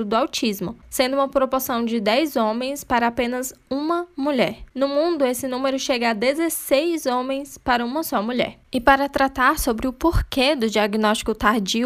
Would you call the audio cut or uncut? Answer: uncut